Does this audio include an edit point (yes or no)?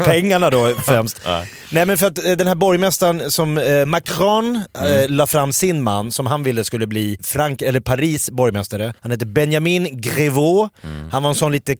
yes